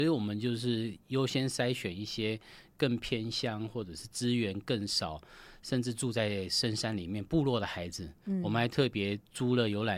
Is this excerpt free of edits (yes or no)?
yes